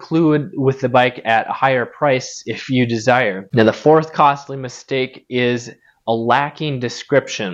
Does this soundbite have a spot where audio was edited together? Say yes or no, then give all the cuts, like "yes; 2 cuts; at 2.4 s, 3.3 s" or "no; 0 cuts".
no; 0 cuts